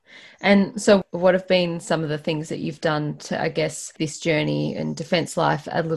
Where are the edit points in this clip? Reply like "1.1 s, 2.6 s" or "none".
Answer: 4.0 s